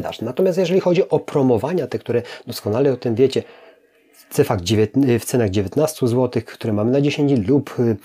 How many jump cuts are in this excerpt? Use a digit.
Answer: 0